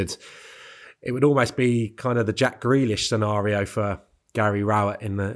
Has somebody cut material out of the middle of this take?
no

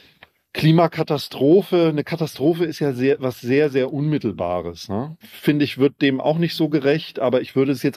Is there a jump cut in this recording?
no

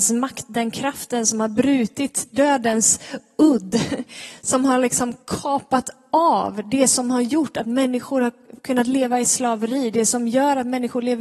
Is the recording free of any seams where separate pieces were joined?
no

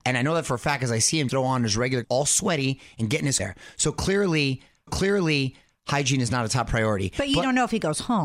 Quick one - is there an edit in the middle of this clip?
yes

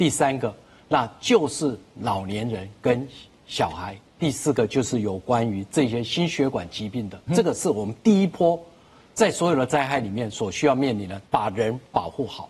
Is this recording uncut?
no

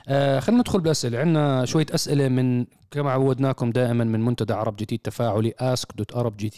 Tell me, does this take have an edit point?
no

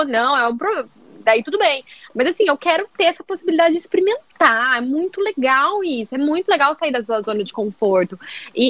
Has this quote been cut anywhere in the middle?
no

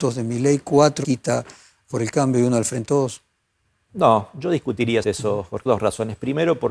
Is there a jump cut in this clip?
yes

